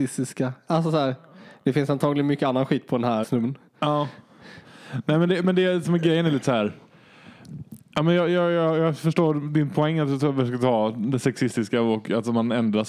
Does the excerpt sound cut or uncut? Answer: cut